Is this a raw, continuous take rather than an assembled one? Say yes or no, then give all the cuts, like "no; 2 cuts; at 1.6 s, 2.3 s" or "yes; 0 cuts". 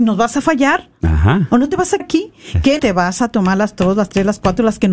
no; 2 cuts; at 2.0 s, 2.8 s